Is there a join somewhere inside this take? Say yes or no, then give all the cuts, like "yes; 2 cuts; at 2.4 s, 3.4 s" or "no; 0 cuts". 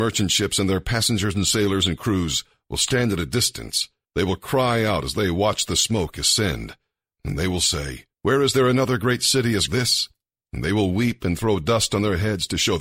yes; 3 cuts; at 4.0 s, 8.1 s, 9.7 s